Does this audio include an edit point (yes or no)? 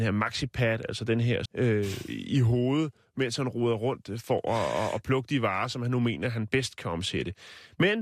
yes